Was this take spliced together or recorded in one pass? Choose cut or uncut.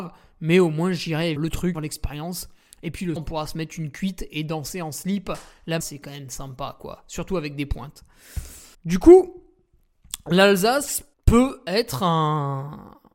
cut